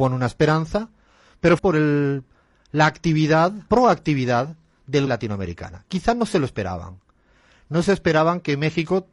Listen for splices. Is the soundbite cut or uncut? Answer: cut